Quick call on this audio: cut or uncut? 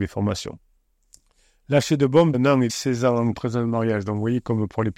cut